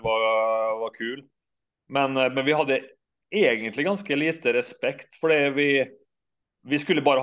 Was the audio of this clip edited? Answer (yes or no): no